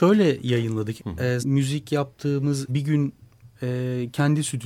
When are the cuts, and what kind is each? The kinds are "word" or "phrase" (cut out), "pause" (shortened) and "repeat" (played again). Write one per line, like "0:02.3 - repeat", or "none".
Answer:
0:01.0 - phrase
0:01.4 - word
0:02.7 - word